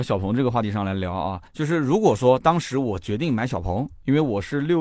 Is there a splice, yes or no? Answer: yes